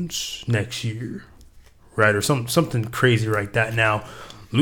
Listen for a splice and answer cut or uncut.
uncut